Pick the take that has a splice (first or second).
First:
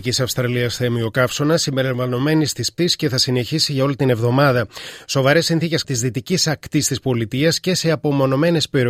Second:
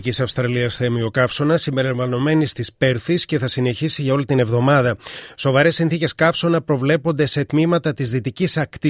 first